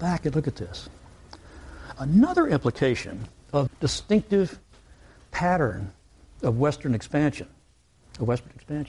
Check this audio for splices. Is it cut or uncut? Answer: cut